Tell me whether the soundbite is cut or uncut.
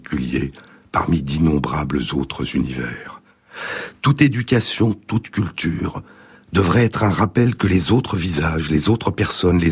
uncut